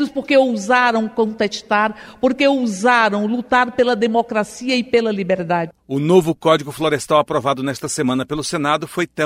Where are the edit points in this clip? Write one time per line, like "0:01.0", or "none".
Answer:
none